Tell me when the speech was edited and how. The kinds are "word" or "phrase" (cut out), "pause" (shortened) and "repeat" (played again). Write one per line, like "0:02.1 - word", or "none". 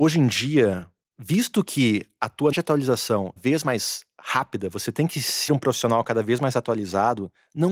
0:01.0 - pause
0:02.5 - word
0:03.4 - phrase
0:05.5 - word